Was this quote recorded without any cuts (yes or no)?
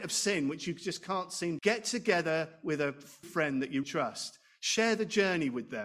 no